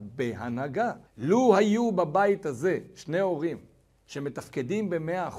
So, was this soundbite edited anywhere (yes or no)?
yes